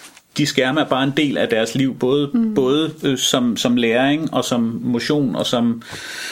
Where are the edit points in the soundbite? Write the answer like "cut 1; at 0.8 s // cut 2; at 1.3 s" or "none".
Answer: none